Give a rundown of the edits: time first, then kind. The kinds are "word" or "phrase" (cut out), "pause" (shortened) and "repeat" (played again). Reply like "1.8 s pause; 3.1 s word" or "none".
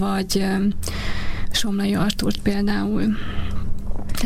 none